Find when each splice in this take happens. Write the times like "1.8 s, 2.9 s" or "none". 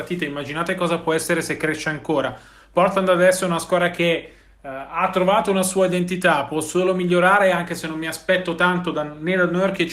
none